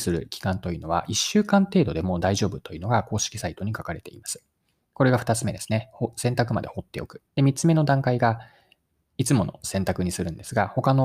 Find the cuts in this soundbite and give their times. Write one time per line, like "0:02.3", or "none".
0:07.3

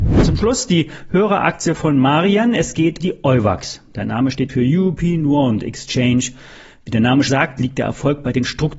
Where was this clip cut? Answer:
0:03.0
0:04.5
0:07.3

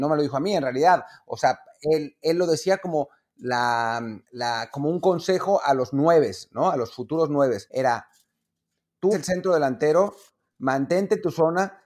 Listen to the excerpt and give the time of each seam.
0:04.2
0:07.7
0:09.1

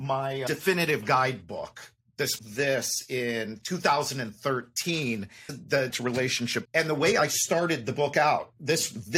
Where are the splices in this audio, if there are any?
0:02.4
0:05.5
0:05.9
0:06.7

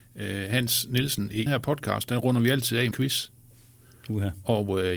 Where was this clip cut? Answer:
0:01.5
0:02.9

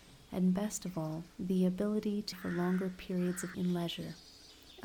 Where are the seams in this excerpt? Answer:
0:01.3
0:02.3
0:03.5

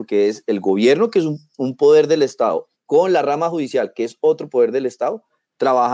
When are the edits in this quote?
none

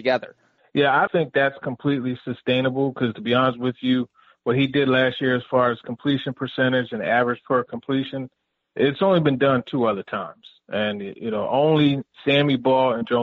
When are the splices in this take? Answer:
0:01.1

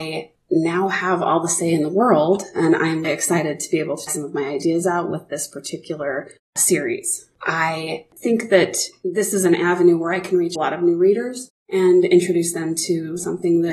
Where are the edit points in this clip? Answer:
0:03.0
0:04.1
0:10.6

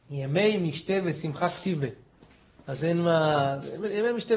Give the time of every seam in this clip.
none

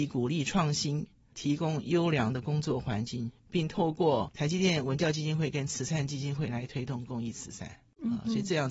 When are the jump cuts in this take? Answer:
none

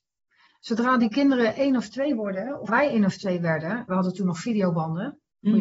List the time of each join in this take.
0:02.7
0:03.9

